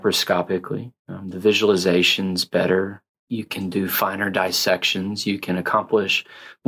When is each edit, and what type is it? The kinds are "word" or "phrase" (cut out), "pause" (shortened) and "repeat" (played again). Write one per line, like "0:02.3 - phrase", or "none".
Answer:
0:01.0 - pause